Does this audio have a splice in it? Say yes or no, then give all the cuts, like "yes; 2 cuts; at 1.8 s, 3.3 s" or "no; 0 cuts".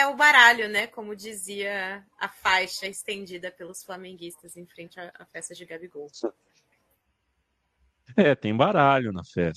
no; 0 cuts